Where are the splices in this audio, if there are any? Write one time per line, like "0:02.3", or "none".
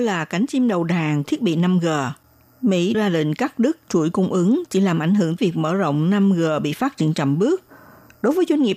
0:01.2
0:02.9
0:05.4